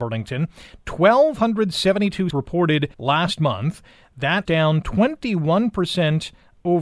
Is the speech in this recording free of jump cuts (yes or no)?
no